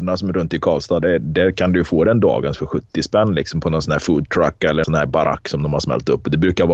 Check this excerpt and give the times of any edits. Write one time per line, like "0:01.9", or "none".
0:01.0
0:04.8